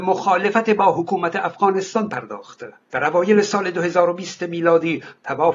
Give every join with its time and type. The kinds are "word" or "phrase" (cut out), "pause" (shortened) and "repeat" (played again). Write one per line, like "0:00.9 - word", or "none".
0:02.8 - pause